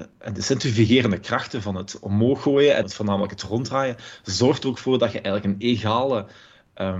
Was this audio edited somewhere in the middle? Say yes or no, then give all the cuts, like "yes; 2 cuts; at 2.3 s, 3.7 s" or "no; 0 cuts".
yes; 1 cut; at 2.8 s